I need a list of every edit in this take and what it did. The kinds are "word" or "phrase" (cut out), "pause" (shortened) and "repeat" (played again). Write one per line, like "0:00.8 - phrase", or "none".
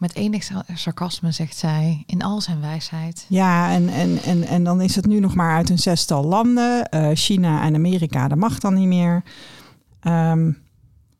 none